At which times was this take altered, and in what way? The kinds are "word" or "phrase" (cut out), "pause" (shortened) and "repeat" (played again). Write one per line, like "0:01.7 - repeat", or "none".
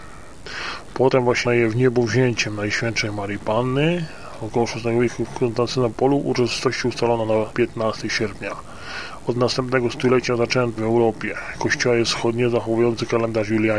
0:01.4 - word
0:07.5 - word
0:10.8 - phrase